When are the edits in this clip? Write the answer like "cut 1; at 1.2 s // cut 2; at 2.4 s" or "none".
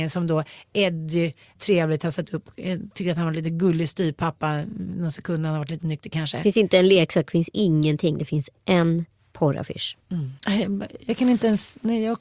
cut 1; at 1.6 s // cut 2; at 10.4 s